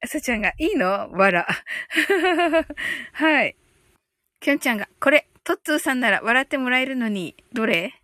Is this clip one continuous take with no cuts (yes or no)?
no